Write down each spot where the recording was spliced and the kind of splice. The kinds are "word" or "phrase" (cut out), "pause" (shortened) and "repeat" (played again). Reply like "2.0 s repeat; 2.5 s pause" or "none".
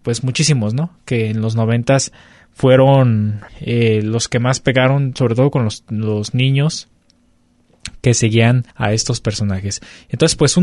3.5 s pause; 8.7 s pause